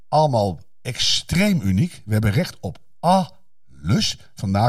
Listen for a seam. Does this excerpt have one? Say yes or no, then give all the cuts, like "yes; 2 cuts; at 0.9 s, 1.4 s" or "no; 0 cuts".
no; 0 cuts